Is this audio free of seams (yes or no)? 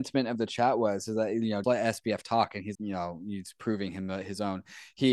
no